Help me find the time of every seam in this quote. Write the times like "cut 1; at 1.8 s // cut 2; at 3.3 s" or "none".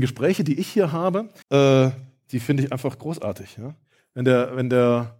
cut 1; at 1.4 s